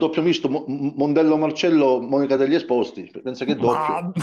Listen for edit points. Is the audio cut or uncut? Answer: uncut